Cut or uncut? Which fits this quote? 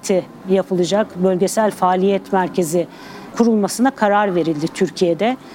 uncut